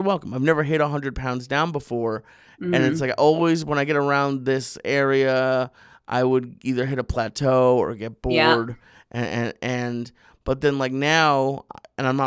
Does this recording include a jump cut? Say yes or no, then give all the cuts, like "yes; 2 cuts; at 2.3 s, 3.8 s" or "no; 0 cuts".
no; 0 cuts